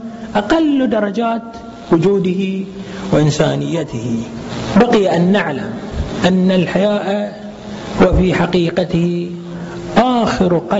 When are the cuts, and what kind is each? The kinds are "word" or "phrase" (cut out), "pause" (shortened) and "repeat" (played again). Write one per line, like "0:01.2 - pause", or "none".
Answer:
none